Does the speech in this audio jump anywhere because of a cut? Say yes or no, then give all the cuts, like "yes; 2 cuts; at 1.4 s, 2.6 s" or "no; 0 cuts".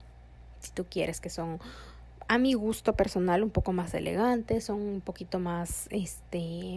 no; 0 cuts